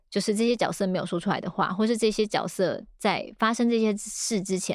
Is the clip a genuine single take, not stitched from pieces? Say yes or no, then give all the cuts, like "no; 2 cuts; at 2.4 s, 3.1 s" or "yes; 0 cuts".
yes; 0 cuts